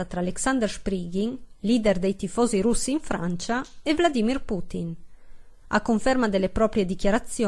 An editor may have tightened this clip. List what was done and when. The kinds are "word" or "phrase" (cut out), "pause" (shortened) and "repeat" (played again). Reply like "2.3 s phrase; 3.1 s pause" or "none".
none